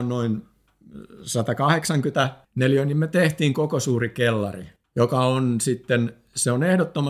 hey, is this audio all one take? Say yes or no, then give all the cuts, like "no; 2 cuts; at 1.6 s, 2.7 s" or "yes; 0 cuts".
no; 2 cuts; at 2.4 s, 4.8 s